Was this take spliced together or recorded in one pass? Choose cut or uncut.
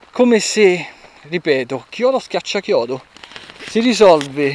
uncut